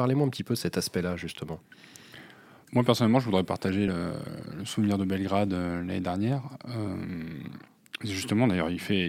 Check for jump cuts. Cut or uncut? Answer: uncut